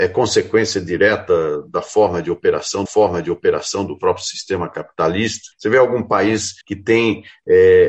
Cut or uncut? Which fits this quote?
cut